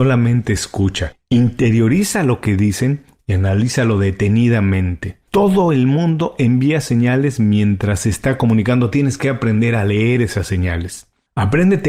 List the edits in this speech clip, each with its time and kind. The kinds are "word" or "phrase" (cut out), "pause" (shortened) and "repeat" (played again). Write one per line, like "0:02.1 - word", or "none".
none

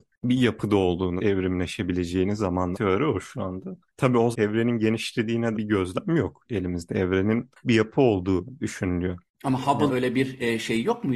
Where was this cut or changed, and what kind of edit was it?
0:01.2 - word
0:02.7 - word
0:04.3 - word
0:05.5 - word
0:07.6 - word
0:09.9 - word

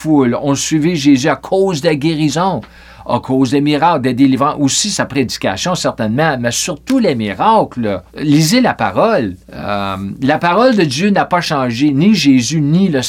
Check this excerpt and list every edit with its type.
0:08.1 - pause
0:09.4 - pause

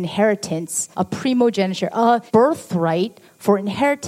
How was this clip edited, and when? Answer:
0:00.9 - pause
0:02.3 - pause

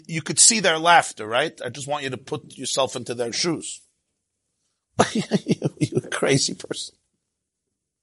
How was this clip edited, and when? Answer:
none

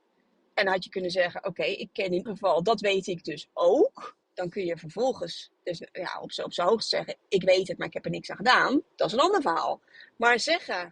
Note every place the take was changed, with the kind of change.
0:02.3 - word
0:04.2 - pause
0:08.9 - pause

